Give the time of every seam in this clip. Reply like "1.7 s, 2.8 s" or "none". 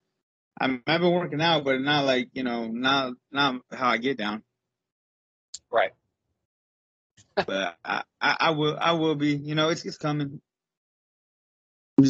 none